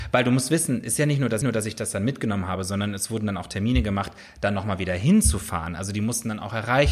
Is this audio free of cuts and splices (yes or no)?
no